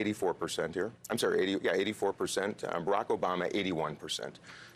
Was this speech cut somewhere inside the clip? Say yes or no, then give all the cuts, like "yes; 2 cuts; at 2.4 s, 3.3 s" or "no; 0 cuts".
yes; 1 cut; at 1.0 s